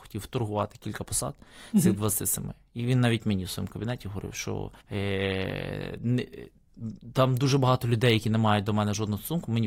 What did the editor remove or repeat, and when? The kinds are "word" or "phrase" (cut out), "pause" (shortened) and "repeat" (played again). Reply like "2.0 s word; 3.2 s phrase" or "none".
4.8 s pause